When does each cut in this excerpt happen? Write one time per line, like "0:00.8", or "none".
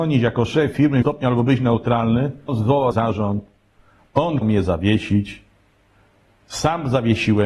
0:01.0
0:02.5
0:02.9
0:04.4

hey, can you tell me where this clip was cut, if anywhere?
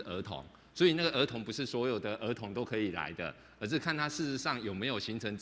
none

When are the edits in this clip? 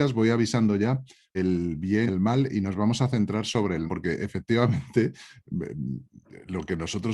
0:01.3
0:02.1
0:03.9

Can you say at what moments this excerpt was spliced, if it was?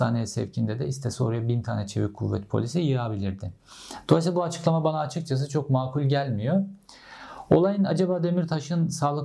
none

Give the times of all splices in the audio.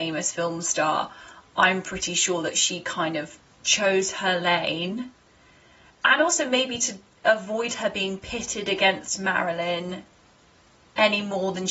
none

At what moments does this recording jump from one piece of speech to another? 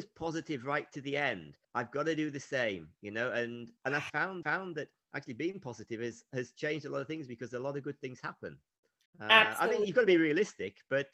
0:01.6
0:03.8
0:04.4

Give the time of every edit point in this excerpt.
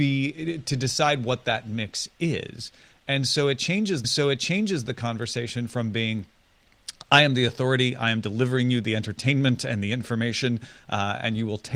0:04.0

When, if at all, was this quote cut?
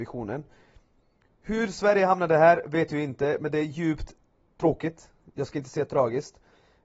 0:04.3

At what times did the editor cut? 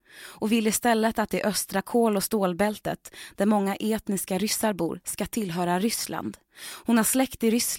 0:06.5

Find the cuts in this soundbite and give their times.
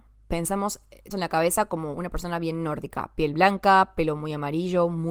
0:01.1
0:03.3

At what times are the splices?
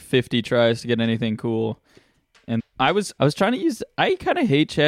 0:02.6
0:03.2

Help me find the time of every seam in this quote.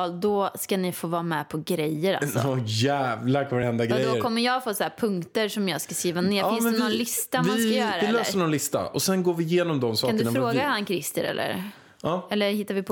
none

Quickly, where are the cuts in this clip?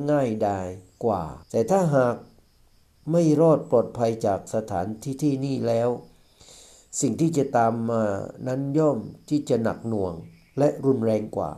0:01.4

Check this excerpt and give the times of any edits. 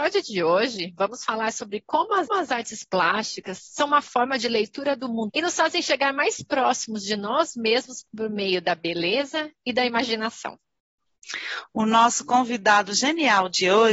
0:02.3
0:05.3

